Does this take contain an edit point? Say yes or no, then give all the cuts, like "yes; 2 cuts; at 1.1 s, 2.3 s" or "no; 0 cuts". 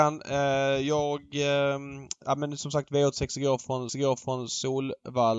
yes; 1 cut; at 3.9 s